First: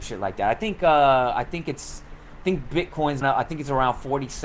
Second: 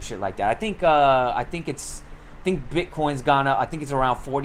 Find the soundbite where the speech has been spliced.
first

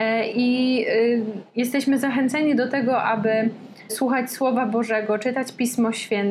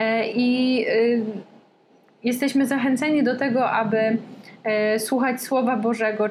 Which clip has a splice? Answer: first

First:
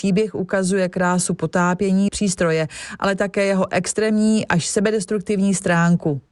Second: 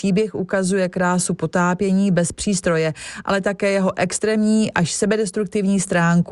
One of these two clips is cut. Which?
first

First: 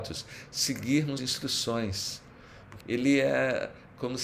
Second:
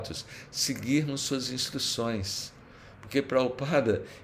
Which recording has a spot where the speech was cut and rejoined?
first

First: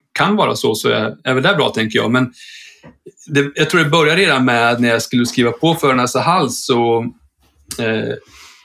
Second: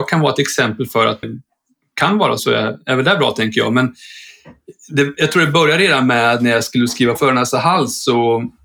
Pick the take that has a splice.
second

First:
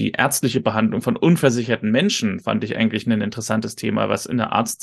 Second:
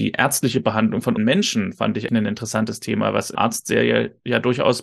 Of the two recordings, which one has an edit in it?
second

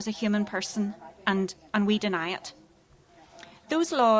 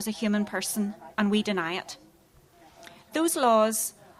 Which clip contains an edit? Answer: second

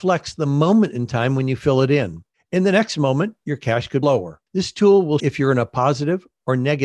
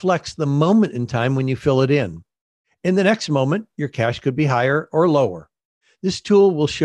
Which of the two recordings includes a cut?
first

